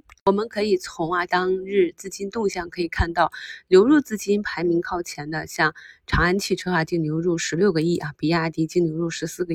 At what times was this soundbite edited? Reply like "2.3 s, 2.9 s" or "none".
1.3 s